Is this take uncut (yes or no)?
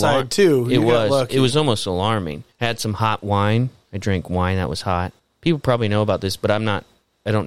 no